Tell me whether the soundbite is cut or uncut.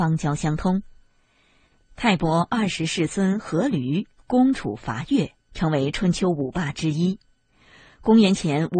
uncut